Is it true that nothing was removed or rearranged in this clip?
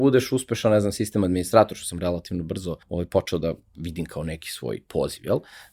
no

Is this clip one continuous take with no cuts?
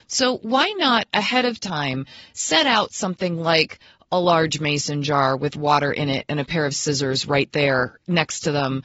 yes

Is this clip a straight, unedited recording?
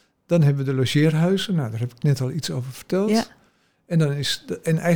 yes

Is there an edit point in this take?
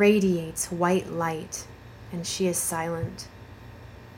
no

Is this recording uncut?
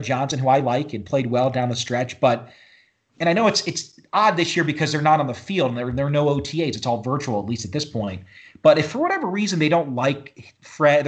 yes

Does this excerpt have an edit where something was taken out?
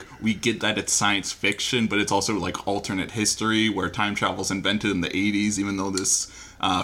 no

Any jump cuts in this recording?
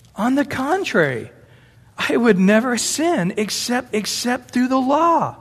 yes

